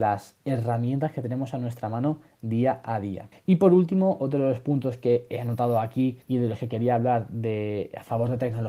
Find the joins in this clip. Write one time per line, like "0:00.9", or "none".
0:03.3
0:06.2